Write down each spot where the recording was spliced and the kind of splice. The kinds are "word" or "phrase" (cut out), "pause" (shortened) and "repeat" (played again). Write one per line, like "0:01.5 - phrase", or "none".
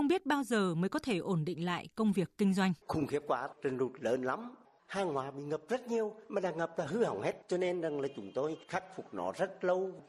0:02.8 - pause
0:06.2 - pause
0:07.4 - pause
0:08.6 - pause